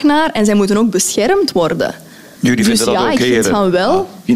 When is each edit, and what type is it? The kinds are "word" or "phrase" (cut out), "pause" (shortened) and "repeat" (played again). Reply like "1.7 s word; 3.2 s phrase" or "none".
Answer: none